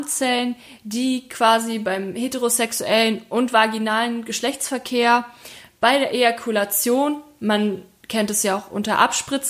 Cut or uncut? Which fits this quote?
uncut